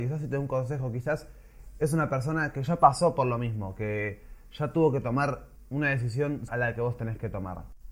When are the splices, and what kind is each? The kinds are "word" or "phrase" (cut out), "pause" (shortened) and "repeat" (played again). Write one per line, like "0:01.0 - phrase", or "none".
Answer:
0:06.5 - word